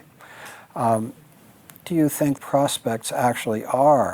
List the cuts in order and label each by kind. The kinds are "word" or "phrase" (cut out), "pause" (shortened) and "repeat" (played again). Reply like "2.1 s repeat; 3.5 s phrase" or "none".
1.8 s word; 2.4 s word